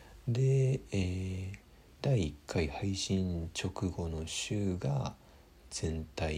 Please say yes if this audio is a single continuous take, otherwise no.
yes